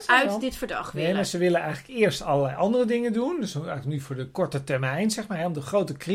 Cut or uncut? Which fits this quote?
uncut